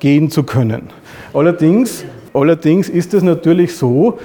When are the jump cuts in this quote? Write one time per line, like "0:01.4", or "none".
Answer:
0:02.3

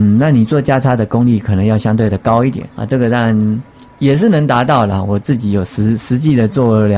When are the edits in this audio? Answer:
0:02.7

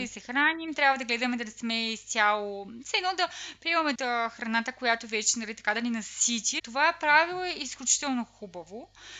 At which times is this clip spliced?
0:04.0

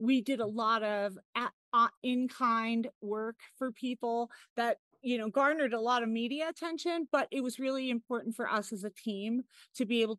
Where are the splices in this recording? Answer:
none

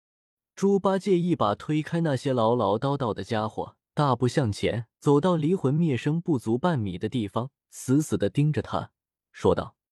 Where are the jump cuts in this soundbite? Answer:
0:03.9
0:04.9
0:07.6

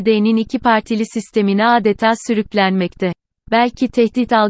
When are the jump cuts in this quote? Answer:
none

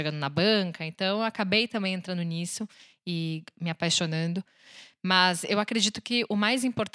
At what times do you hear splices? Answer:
none

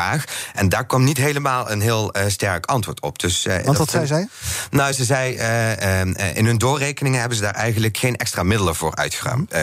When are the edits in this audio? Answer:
none

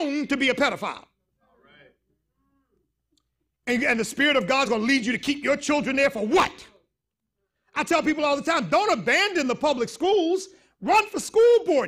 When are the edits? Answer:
none

